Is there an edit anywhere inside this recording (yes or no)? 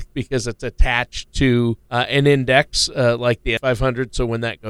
yes